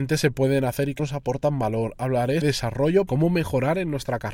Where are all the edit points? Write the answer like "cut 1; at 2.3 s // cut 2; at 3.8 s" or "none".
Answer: cut 1; at 1.0 s // cut 2; at 2.4 s // cut 3; at 3.1 s